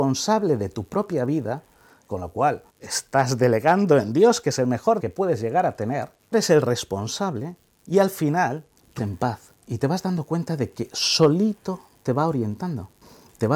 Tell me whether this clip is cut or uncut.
cut